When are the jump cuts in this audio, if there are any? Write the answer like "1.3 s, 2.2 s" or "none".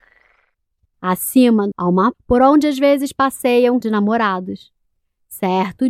1.7 s, 2.1 s, 3.8 s